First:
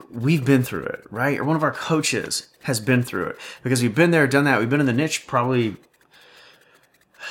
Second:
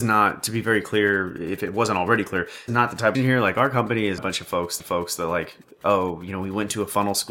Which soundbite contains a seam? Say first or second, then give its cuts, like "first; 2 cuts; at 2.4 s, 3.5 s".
second; 4 cuts; at 2.7 s, 3.1 s, 4.2 s, 4.8 s